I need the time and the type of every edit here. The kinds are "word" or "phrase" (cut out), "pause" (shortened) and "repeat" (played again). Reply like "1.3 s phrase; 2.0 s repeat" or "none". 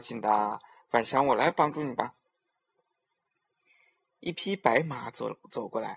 none